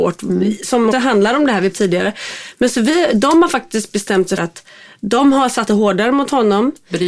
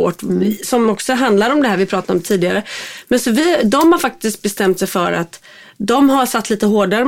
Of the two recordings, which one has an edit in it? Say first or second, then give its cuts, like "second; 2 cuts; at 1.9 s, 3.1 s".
first; 4 cuts; at 0.9 s, 1.7 s, 4.4 s, 5.7 s